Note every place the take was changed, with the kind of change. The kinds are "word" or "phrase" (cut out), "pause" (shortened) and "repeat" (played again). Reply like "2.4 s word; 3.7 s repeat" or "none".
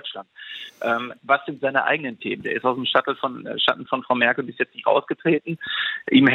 none